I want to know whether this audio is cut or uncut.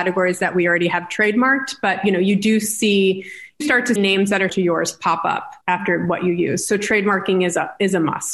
cut